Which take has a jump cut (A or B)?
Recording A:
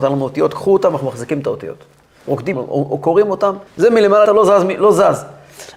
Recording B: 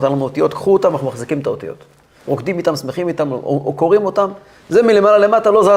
A